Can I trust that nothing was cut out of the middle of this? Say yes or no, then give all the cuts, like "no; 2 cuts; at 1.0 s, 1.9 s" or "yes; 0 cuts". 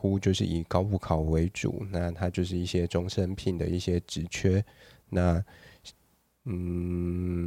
yes; 0 cuts